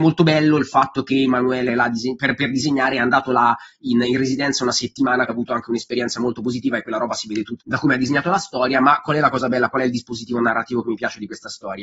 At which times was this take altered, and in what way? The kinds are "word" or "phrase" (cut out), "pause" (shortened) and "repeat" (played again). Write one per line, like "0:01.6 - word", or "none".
0:01.7 - phrase
0:05.3 - word
0:07.6 - word

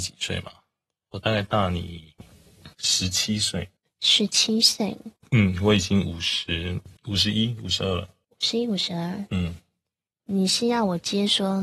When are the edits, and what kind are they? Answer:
0:02.7 - pause
0:03.8 - pause
0:05.2 - pause
0:07.0 - pause
0:08.2 - pause

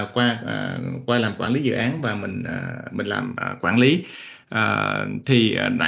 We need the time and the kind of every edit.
none

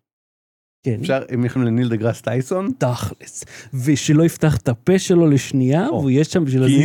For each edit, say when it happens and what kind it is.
0:01.6 - word

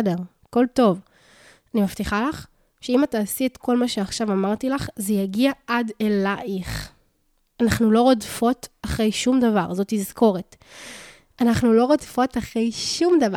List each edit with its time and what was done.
none

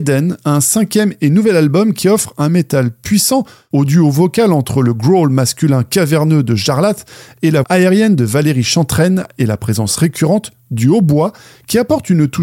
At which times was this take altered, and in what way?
0:07.6 - word

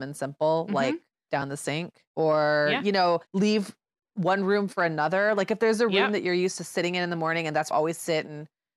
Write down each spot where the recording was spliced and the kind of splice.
0:01.3 - word
0:02.1 - pause
0:03.3 - pause
0:07.7 - phrase

